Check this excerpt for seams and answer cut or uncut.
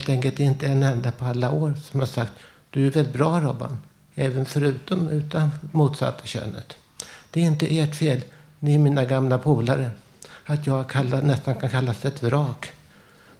uncut